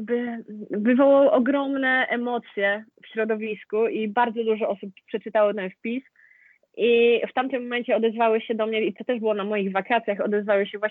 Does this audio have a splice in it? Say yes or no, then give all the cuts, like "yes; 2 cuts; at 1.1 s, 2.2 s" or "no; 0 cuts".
no; 0 cuts